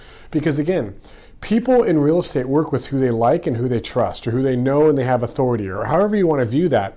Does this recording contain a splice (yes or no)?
no